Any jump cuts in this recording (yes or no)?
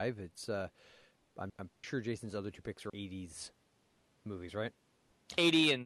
yes